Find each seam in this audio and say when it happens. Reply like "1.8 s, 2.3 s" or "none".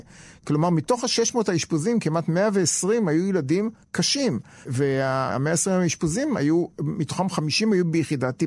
none